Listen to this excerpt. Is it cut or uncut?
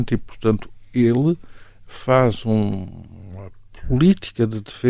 uncut